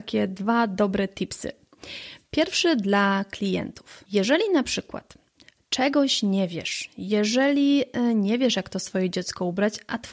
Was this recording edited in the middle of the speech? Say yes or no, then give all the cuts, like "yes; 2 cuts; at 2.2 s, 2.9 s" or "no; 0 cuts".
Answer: no; 0 cuts